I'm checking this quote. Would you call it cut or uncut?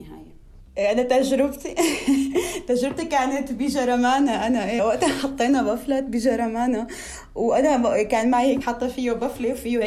cut